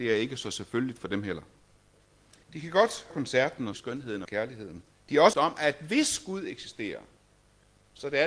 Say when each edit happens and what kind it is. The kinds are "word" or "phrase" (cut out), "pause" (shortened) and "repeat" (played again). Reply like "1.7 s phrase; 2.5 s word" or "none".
2.4 s pause; 3.1 s word; 3.7 s word; 4.2 s word; 4.9 s pause; 5.3 s word